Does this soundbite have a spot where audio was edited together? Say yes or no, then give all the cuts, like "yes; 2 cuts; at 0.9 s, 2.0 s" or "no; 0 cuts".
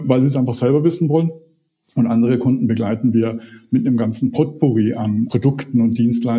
no; 0 cuts